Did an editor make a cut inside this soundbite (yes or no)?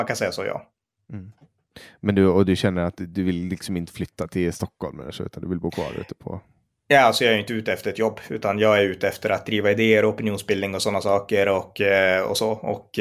no